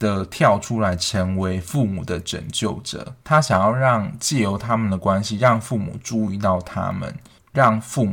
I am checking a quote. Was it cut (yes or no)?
yes